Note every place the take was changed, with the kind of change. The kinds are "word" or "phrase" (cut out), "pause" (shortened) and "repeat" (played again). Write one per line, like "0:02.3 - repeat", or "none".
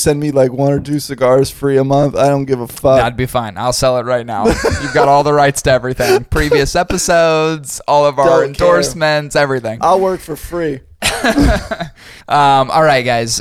0:12.2 - pause